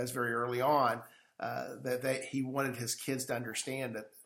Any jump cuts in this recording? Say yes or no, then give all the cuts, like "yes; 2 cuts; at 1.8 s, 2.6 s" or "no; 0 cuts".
no; 0 cuts